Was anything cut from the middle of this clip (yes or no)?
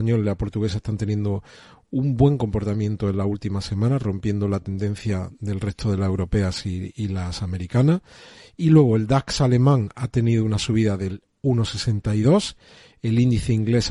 no